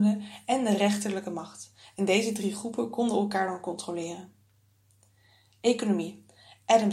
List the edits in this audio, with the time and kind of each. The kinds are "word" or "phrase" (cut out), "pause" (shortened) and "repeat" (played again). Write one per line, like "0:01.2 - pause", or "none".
none